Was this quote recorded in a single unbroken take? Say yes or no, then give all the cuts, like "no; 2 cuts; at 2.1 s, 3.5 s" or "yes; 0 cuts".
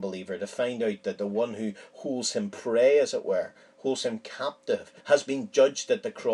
no; 1 cut; at 5.0 s